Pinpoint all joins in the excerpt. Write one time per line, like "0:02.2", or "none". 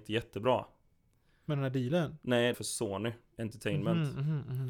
0:02.5